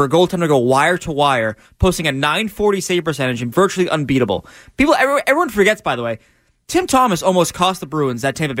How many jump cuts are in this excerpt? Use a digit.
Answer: 1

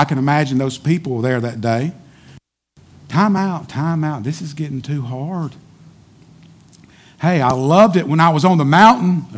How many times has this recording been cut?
0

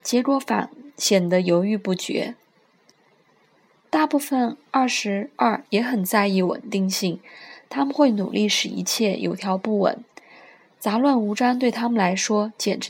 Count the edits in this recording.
0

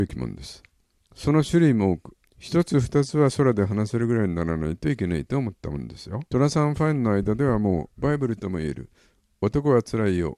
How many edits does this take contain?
3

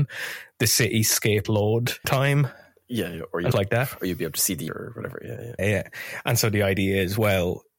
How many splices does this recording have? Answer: 5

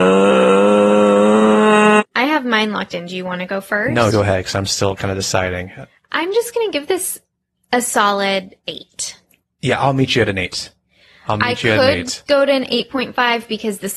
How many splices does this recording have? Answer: 1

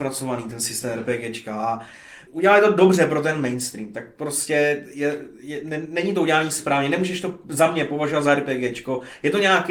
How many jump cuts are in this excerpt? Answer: 1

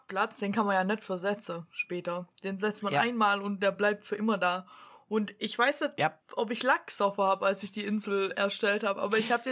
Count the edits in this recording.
1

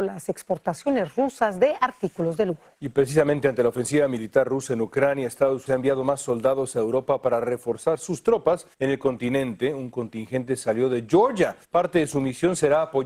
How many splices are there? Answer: 4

